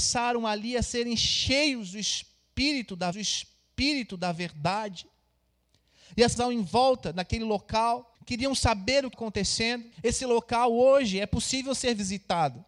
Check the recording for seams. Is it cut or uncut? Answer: cut